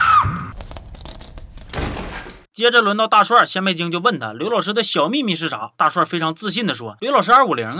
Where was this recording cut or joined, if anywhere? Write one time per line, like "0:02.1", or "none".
0:02.4

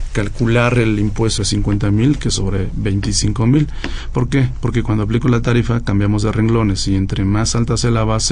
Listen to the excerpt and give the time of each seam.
0:01.4

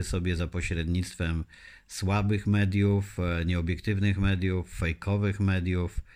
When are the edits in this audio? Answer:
none

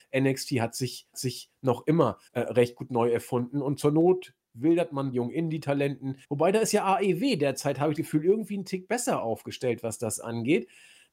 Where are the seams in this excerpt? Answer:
0:01.1
0:02.3
0:05.1
0:06.2
0:08.0

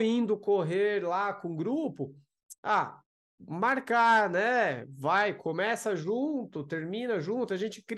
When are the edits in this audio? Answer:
none

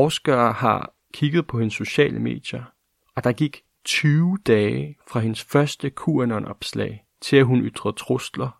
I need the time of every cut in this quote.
0:03.0
0:07.1

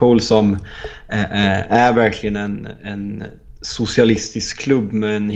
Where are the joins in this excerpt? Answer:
none

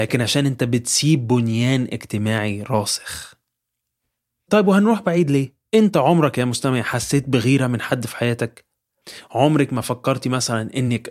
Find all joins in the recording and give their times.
none

